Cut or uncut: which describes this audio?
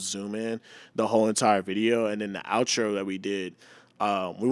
uncut